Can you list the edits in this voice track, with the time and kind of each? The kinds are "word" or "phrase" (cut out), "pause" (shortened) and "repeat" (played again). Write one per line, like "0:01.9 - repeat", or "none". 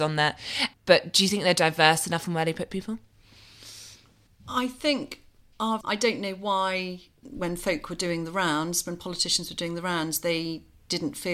0:05.8 - word